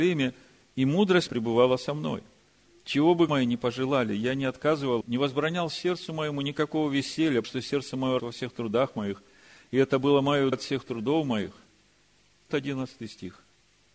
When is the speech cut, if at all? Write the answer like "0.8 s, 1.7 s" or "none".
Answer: 1.3 s, 3.3 s, 5.0 s, 7.4 s, 8.2 s, 10.5 s, 12.5 s